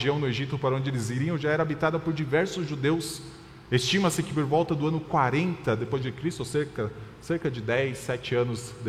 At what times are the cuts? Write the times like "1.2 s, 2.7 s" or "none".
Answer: none